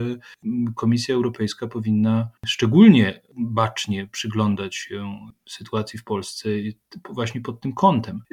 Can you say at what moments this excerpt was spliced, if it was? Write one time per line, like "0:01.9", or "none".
0:02.4